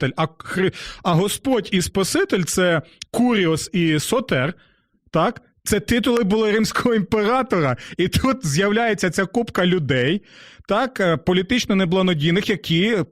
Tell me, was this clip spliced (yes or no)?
no